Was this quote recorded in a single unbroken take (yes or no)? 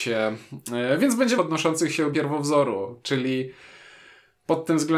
no